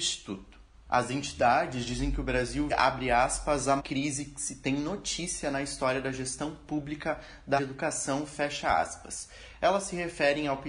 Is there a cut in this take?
yes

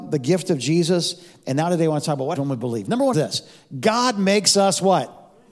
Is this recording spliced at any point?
yes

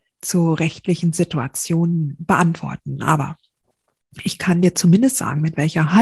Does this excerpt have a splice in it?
no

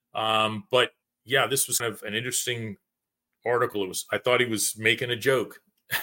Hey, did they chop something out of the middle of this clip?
yes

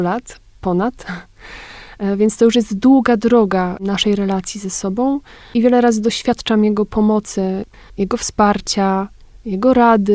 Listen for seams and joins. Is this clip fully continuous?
yes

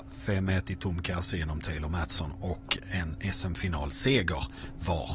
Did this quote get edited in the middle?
no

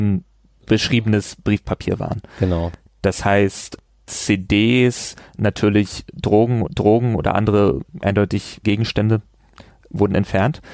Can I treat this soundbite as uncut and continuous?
no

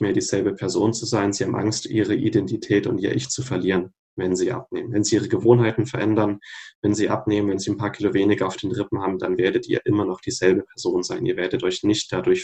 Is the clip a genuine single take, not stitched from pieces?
yes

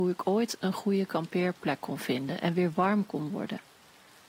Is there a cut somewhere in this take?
no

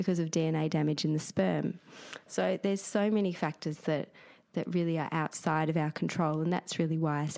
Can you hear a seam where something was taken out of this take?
no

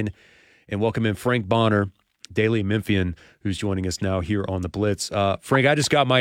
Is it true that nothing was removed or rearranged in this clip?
yes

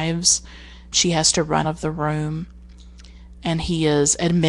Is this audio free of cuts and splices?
no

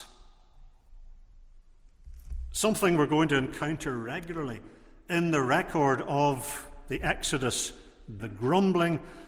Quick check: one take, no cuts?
no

